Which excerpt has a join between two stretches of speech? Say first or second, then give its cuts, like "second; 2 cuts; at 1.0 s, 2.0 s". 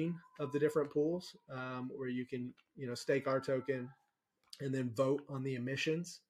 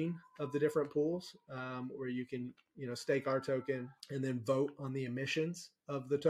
second; 1 cut; at 4.0 s